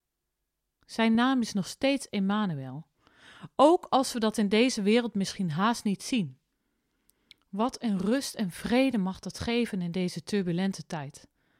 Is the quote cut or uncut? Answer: uncut